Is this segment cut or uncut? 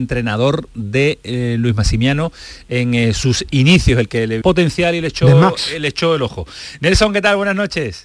cut